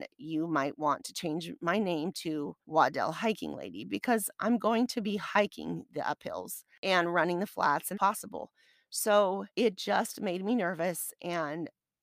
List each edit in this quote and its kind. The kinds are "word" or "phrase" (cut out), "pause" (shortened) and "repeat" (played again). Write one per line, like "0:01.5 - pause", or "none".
0:02.6 - pause
0:07.9 - phrase
0:09.5 - pause